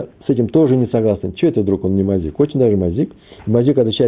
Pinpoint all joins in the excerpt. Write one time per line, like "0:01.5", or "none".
none

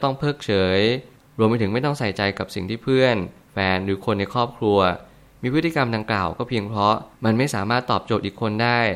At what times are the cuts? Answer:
0:07.1

